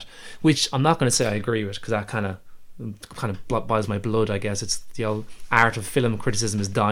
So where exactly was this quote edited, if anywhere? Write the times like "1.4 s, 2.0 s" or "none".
none